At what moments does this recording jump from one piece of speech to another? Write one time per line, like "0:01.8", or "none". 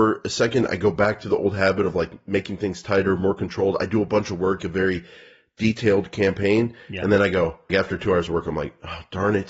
0:04.6
0:07.7